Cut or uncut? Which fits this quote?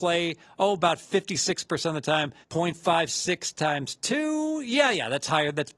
cut